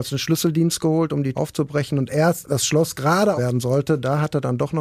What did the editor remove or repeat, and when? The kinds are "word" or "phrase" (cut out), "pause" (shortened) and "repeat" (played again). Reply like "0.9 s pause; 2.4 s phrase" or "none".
1.3 s word; 2.4 s word; 3.4 s word